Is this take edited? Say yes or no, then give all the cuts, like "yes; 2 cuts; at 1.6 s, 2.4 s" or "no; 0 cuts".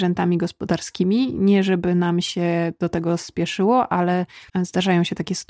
yes; 1 cut; at 4.5 s